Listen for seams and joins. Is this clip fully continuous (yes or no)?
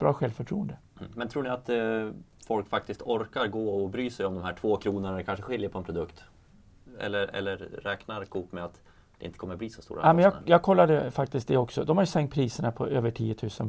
yes